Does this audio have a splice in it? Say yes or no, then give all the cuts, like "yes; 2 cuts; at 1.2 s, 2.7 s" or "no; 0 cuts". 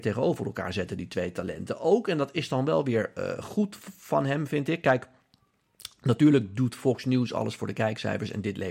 no; 0 cuts